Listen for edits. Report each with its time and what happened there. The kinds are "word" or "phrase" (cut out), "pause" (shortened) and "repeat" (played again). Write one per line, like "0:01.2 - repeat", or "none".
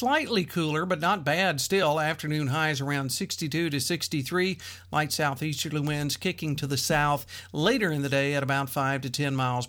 none